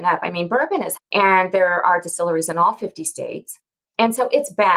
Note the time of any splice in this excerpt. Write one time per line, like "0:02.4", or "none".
0:01.0

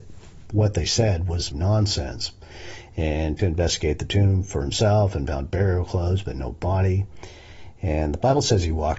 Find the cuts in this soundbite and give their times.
0:01.5
0:03.4

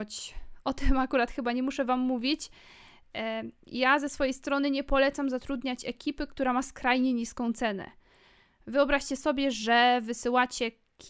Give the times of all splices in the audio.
none

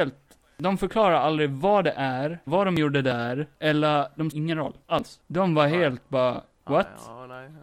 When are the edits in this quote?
0:02.5
0:04.3

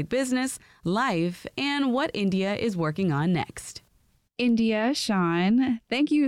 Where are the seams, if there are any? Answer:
none

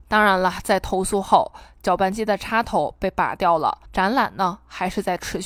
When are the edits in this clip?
0:03.9

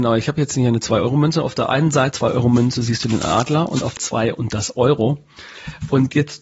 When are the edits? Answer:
0:02.1
0:04.0

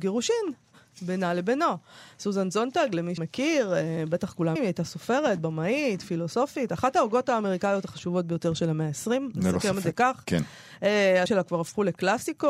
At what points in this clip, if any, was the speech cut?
0:03.2
0:04.6
0:11.3

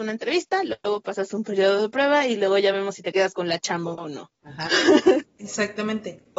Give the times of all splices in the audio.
none

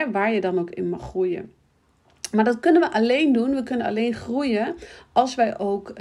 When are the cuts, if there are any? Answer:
none

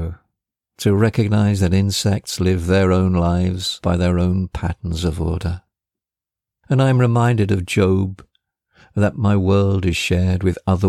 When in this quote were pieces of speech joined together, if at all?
none

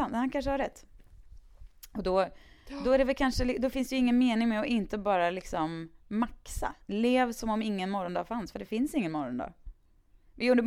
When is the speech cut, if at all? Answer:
none

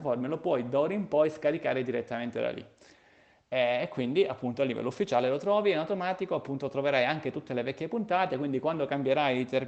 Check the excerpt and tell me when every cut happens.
none

